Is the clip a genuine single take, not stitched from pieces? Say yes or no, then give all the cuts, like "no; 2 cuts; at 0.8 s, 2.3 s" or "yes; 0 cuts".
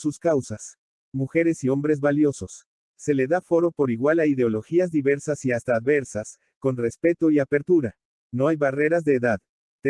yes; 0 cuts